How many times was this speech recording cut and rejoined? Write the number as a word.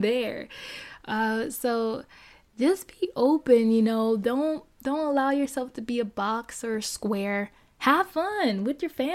zero